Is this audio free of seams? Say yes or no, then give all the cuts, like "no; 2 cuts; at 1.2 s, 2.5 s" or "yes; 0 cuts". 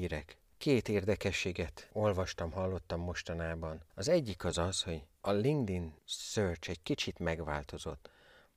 yes; 0 cuts